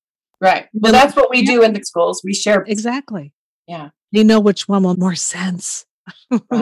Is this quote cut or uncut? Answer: cut